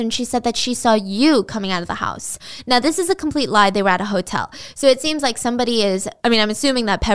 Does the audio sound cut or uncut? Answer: cut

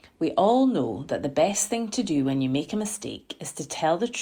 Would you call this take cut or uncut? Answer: uncut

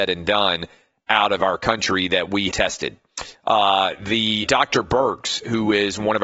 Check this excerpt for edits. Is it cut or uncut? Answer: cut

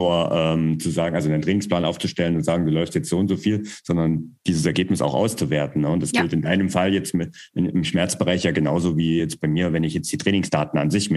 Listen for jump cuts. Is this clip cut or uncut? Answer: uncut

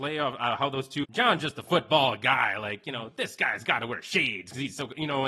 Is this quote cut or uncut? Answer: cut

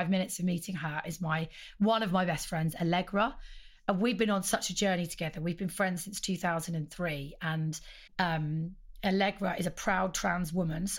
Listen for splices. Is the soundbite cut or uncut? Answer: cut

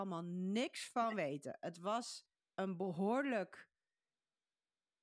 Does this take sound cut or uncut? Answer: cut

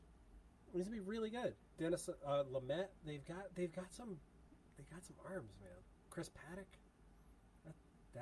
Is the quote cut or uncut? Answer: cut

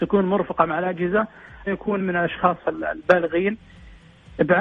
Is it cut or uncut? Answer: cut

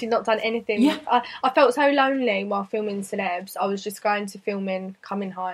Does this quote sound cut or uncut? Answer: uncut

